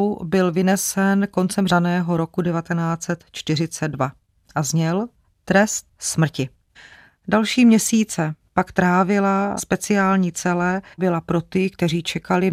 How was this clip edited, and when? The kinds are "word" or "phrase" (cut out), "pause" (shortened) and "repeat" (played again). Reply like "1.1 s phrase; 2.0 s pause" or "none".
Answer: 1.7 s word; 9.6 s word; 11.0 s word